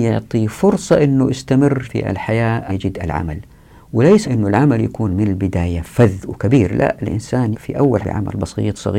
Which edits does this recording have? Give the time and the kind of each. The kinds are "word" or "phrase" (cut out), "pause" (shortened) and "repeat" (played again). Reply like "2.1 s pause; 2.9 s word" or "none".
1.8 s word; 2.7 s word; 4.2 s word; 7.5 s word; 8.0 s word